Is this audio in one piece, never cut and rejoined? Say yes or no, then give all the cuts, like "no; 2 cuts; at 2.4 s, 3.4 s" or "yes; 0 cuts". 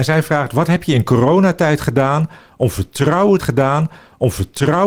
no; 1 cut; at 3.4 s